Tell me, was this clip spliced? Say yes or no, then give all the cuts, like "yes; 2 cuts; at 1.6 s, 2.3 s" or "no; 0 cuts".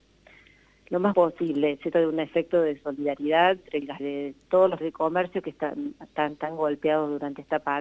yes; 4 cuts; at 1.1 s, 1.9 s, 4.0 s, 4.8 s